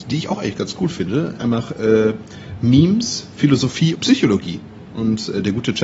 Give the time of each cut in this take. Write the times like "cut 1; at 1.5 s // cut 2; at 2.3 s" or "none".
cut 1; at 1.4 s // cut 2; at 3.9 s